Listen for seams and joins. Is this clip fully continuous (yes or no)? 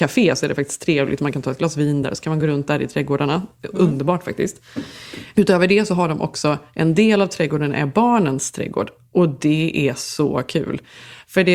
yes